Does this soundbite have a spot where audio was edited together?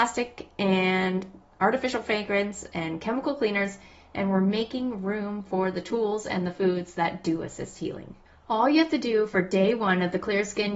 no; 0 cuts

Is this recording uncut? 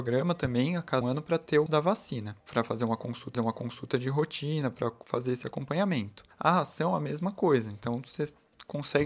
no; 5 cuts; at 1.0 s, 1.7 s, 2.4 s, 3.3 s, 6.3 s

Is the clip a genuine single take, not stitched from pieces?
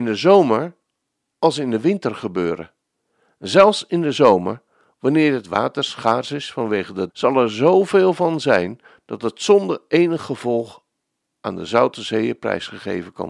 no; 1 cut; at 7.1 s

